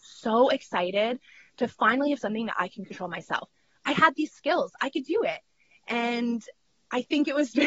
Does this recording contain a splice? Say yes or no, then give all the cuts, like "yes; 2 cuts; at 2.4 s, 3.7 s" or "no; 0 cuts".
no; 0 cuts